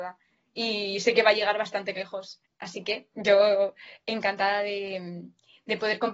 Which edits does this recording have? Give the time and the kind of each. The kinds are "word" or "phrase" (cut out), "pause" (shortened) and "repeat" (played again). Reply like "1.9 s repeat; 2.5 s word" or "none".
2.5 s pause